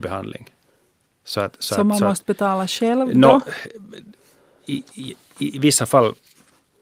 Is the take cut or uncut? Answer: cut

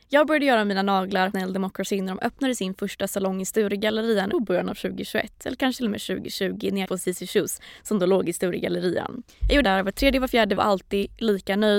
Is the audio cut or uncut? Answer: cut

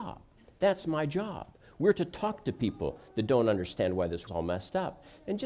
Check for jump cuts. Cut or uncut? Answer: cut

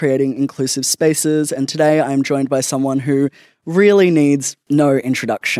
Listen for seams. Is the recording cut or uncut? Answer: uncut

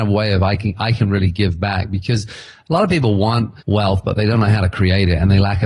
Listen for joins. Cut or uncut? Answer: cut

